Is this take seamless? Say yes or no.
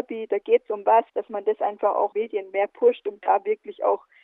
no